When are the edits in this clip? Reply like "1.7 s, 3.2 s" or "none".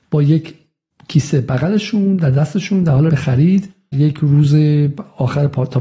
3.1 s, 3.9 s